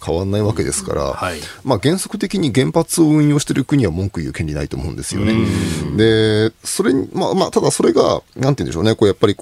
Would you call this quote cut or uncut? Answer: cut